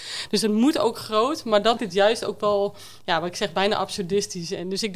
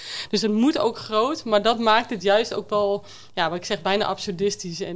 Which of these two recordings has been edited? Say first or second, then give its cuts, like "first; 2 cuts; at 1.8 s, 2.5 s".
first; 1 cut; at 1.8 s